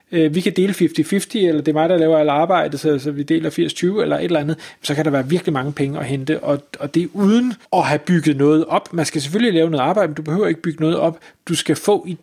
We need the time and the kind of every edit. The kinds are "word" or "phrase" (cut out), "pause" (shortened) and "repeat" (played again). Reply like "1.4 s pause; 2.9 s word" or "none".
7.6 s pause

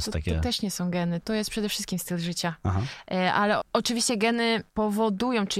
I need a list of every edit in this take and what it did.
1.2 s word; 3.6 s word; 4.7 s pause

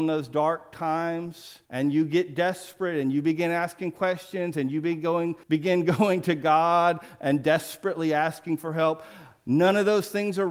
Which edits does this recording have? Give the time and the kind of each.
1.6 s pause; 5.4 s pause

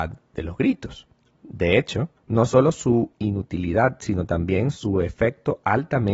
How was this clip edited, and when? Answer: 1.2 s pause; 2.2 s pause

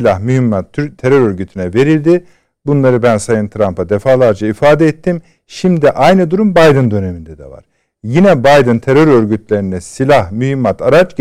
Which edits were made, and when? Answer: none

